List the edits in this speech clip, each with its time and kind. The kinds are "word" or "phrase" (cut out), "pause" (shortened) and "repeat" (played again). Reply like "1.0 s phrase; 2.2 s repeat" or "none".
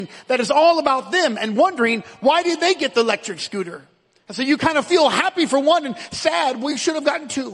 none